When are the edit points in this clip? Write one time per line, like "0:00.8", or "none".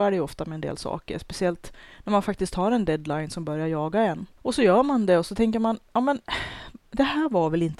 none